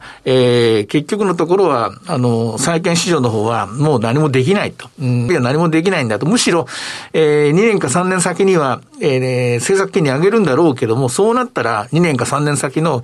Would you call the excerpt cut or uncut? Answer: cut